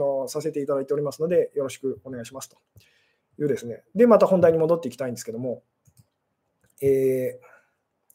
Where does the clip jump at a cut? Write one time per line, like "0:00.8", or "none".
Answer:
none